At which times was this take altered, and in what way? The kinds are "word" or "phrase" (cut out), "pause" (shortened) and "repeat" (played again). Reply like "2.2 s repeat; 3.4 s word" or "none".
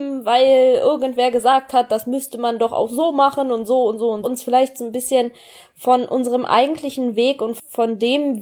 4.2 s word